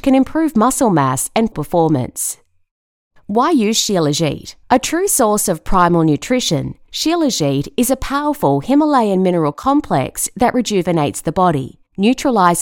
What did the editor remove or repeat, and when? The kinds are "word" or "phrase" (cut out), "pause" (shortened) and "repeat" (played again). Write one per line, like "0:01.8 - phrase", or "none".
0:01.5 - word
0:04.6 - pause